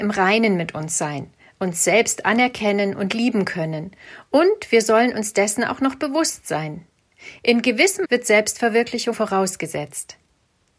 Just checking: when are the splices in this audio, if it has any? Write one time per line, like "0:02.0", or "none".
0:08.0
0:09.1